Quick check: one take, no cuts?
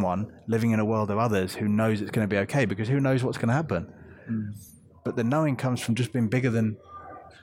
yes; 0 cuts

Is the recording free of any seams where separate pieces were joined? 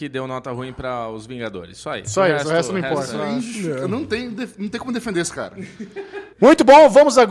no; 1 cut; at 6.3 s

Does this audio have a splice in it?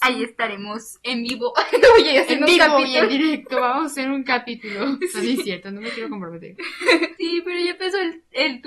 no; 0 cuts

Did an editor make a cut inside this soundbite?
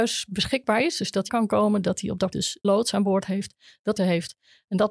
yes; 4 cuts; at 1.3 s, 2.3 s, 2.6 s, 4.0 s

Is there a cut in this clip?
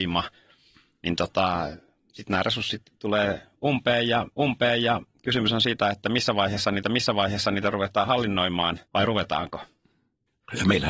yes; 3 cuts; at 4.3 s, 6.8 s, 8.9 s

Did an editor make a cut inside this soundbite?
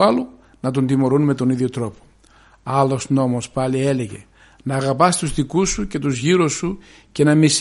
no; 0 cuts

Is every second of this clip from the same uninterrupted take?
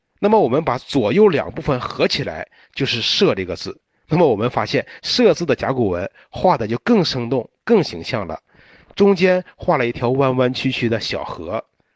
yes; 0 cuts

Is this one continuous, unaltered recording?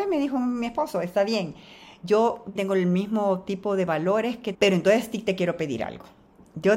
no; 2 cuts; at 2.6 s, 4.5 s

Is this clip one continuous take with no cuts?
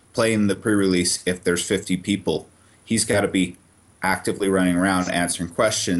yes; 0 cuts

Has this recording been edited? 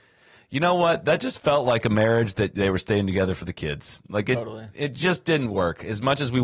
no; 0 cuts

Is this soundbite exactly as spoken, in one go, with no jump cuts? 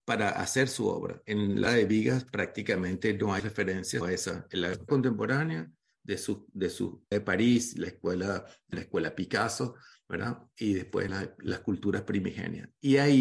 no; 7 cuts; at 1.7 s, 3.4 s, 4.0 s, 4.9 s, 7.1 s, 8.7 s, 11.1 s

